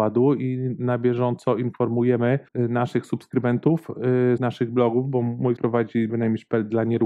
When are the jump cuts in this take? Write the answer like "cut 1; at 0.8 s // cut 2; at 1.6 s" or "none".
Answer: cut 1; at 2.5 s // cut 2; at 4.4 s // cut 3; at 5.6 s // cut 4; at 6.1 s